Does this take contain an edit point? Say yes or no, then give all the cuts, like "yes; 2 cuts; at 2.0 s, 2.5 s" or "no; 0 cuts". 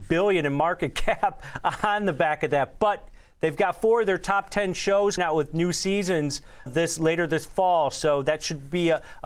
yes; 2 cuts; at 5.2 s, 6.7 s